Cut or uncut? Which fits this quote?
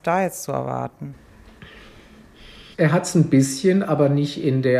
cut